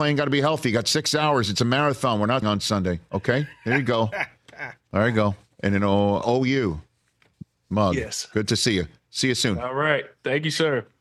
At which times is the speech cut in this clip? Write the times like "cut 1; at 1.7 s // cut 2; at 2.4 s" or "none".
cut 1; at 2.4 s // cut 2; at 6.2 s

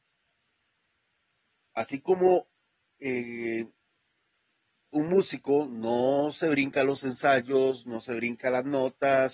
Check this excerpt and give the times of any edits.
none

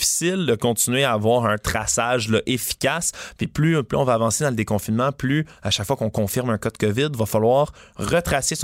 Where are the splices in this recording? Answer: none

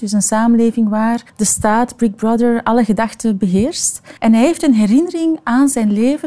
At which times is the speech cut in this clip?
cut 1; at 1.3 s // cut 2; at 4.2 s

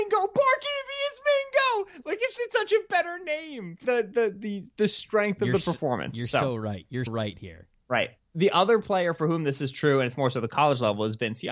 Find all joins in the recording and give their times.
cut 1; at 2.4 s // cut 2; at 3.8 s // cut 3; at 7.1 s

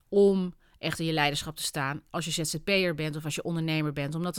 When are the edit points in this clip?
none

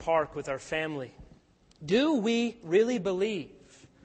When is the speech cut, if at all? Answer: cut 1; at 1.5 s

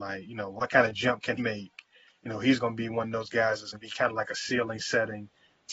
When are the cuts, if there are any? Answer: cut 1; at 1.4 s // cut 2; at 3.7 s

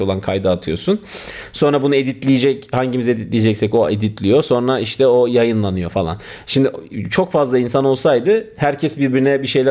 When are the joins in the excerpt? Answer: none

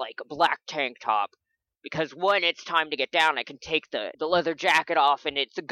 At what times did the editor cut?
cut 1; at 4.1 s

